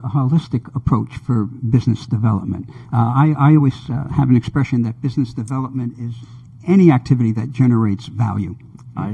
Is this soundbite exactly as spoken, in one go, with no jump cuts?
yes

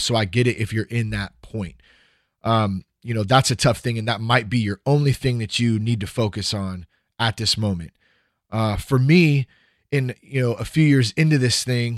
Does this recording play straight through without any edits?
yes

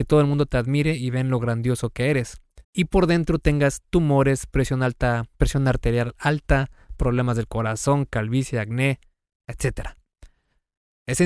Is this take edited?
yes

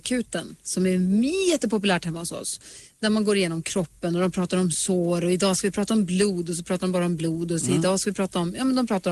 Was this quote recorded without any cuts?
yes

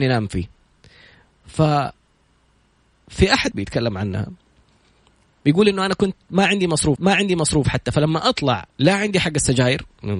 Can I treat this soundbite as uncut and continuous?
no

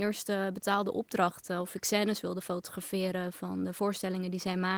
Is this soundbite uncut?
yes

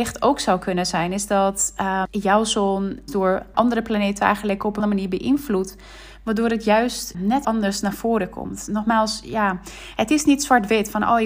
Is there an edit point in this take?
yes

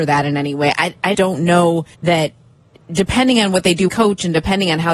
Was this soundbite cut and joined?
yes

